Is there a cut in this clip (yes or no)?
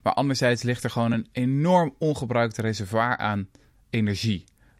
no